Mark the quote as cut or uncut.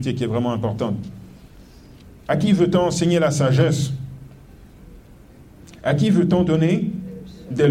uncut